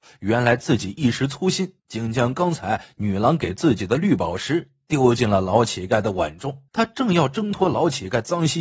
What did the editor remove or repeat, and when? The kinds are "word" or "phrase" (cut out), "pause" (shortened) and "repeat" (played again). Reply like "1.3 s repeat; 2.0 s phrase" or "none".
1.8 s pause; 6.7 s pause